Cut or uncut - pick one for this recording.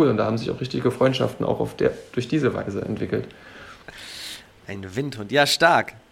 uncut